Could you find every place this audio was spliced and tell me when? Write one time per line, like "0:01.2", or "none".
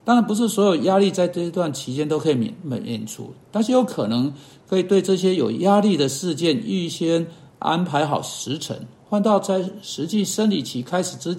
none